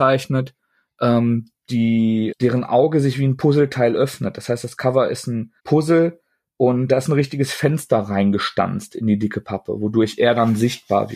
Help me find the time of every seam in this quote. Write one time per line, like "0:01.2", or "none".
0:02.3
0:05.6
0:06.9

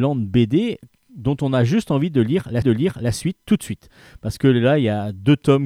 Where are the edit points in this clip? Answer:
0:02.6

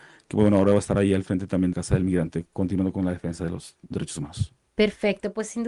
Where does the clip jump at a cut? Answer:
0:01.7
0:03.9

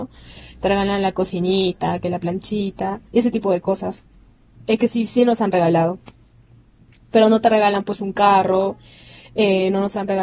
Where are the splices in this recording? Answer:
0:03.1

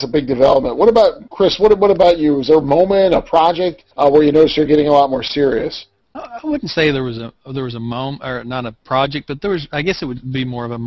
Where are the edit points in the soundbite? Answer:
0:01.3
0:03.9

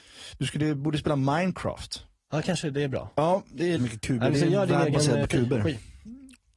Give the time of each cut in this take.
0:03.8

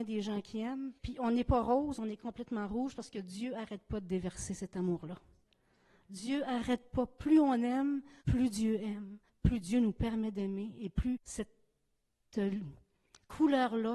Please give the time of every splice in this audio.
0:01.0
0:08.2
0:09.3
0:11.2

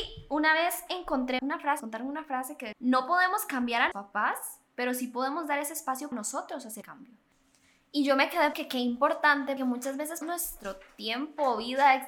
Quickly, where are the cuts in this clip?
0:01.4
0:01.8
0:02.7
0:03.9
0:06.1
0:06.8
0:08.5
0:09.6
0:10.2

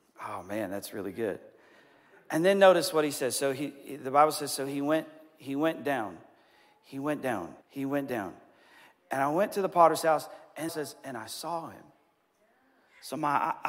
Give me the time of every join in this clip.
0:07.6
0:10.7

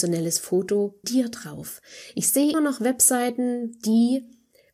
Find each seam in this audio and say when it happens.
0:01.0
0:02.5

